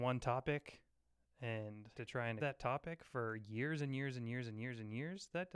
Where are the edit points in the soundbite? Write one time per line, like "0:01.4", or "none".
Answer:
0:01.9
0:02.4